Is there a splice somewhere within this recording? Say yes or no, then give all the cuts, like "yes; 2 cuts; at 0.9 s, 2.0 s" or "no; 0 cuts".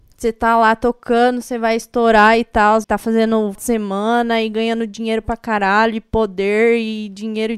yes; 2 cuts; at 2.8 s, 3.5 s